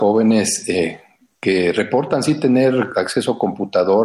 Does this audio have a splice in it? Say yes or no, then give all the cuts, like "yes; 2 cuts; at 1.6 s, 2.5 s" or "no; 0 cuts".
no; 0 cuts